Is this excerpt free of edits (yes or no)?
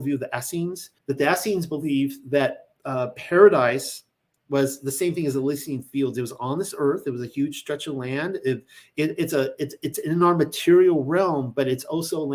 no